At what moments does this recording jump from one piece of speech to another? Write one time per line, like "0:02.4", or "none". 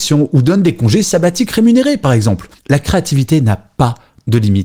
0:02.6